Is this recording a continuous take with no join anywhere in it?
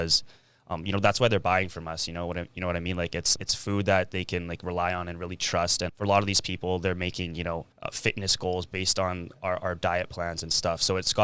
no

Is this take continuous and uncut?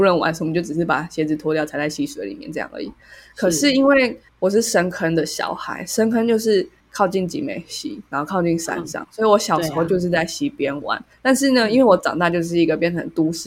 yes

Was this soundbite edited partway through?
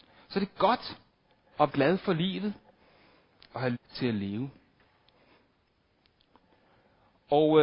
yes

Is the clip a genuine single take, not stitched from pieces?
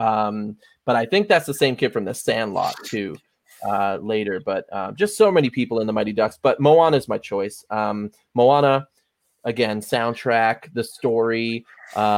yes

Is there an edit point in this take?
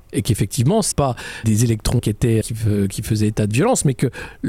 yes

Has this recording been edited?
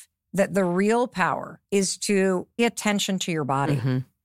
yes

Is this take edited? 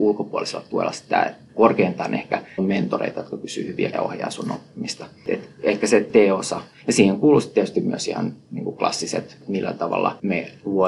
yes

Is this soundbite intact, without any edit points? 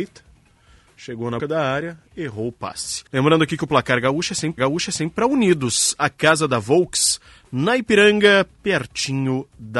no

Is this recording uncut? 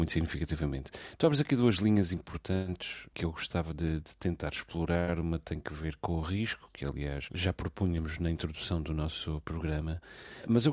yes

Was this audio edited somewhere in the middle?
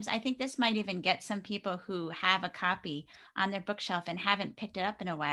no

